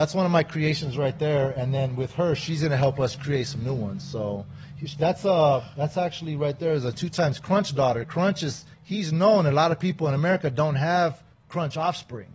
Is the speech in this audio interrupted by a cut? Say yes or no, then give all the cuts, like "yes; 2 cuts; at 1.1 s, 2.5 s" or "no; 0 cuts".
yes; 2 cuts; at 8.7 s, 11.3 s